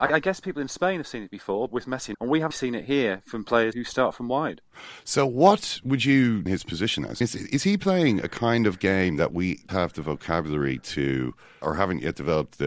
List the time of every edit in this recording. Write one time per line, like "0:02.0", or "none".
0:01.7
0:02.1
0:02.5
0:03.7
0:06.5
0:07.2
0:09.7
0:11.6